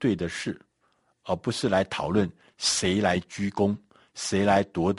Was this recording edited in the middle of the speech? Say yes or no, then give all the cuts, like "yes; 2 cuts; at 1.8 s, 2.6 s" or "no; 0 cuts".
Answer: no; 0 cuts